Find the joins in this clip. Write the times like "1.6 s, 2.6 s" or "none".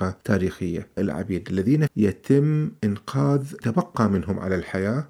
1.0 s, 1.9 s, 3.6 s